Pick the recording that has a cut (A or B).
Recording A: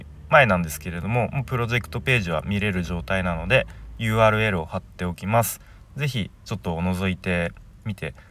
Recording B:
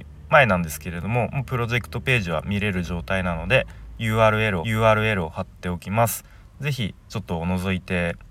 B